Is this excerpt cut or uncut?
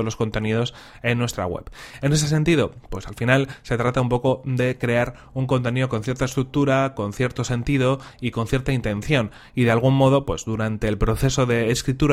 uncut